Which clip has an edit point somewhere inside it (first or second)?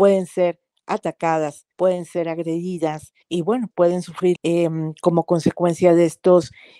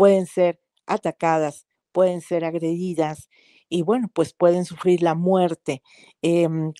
first